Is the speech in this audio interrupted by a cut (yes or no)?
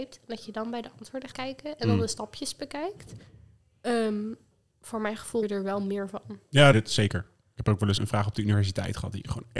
yes